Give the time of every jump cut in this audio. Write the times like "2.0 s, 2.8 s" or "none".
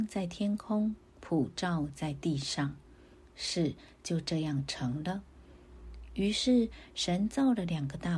none